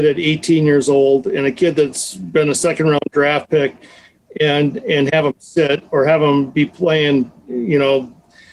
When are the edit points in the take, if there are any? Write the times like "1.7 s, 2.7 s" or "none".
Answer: none